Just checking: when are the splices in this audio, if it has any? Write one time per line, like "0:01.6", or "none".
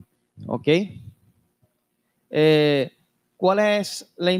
none